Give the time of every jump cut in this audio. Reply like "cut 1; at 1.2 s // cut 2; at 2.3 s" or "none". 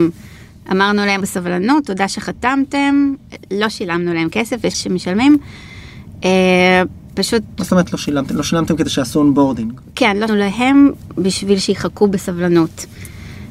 cut 1; at 1.2 s // cut 2; at 4.7 s // cut 3; at 10.3 s